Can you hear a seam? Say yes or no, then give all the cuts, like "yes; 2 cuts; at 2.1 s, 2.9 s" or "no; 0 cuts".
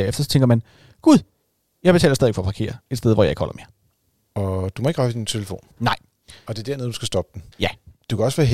yes; 3 cuts; at 2.8 s, 5.7 s, 7.5 s